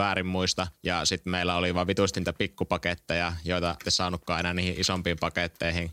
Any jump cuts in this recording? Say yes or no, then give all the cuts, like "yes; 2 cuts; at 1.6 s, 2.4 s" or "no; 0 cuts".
yes; 1 cut; at 3.8 s